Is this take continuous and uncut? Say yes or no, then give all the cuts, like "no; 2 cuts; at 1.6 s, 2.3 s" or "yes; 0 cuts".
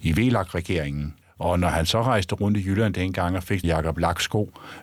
no; 2 cuts; at 1.2 s, 3.6 s